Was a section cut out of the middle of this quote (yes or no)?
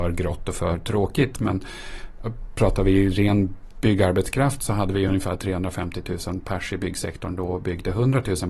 no